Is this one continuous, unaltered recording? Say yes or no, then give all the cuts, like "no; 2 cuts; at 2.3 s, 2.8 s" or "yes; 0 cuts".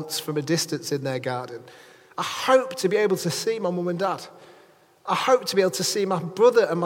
yes; 0 cuts